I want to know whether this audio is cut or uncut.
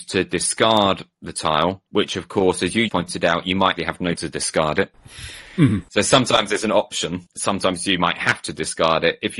cut